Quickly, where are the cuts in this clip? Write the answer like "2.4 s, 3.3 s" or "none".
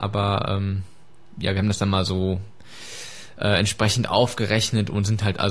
none